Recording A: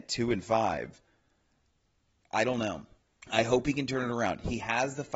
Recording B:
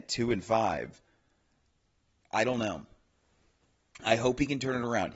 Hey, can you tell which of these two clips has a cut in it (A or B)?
A